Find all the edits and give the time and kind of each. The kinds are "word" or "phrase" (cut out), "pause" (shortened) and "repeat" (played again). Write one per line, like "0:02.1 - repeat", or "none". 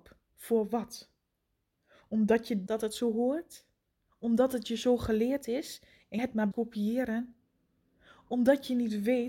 0:02.7 - word
0:06.2 - word
0:06.5 - word

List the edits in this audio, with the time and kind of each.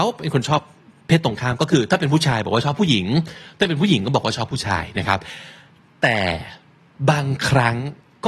none

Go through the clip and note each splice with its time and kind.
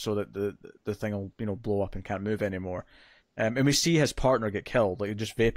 none

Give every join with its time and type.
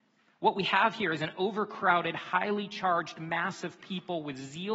none

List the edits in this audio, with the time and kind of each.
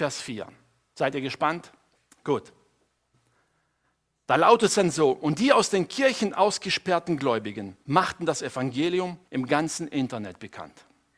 0:01.9 - pause
0:07.8 - pause
0:09.3 - pause

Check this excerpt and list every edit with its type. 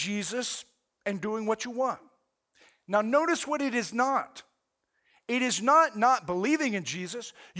none

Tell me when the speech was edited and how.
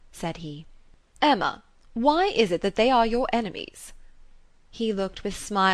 none

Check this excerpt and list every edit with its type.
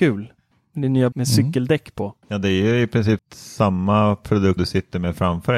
0:01.1 - word
0:02.2 - pause
0:03.2 - word
0:04.6 - word

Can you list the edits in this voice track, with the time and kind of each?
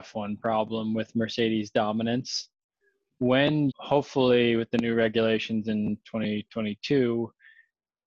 0:03.7 - word

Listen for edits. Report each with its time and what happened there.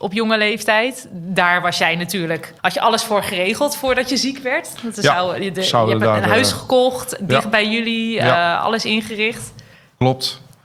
0:02.6 - pause
0:09.7 - pause

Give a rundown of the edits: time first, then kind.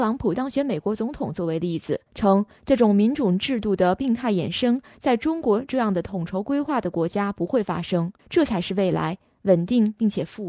0:02.1 - pause
0:08.2 - pause

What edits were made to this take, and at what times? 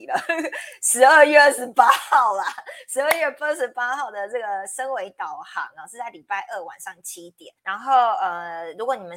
0:07.6 - pause

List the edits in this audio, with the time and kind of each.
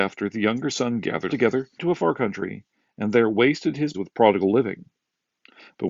0:01.3 - word
0:01.8 - word
0:03.9 - word

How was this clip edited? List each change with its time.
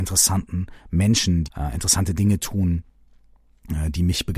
0:01.4 - word

